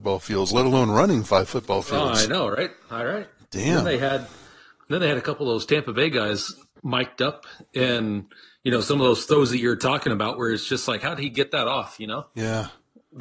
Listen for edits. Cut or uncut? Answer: uncut